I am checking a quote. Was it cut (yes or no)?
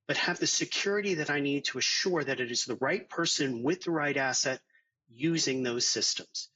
no